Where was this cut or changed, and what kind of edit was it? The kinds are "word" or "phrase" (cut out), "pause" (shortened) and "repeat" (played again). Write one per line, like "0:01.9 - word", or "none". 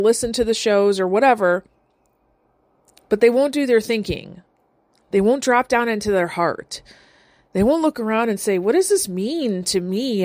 none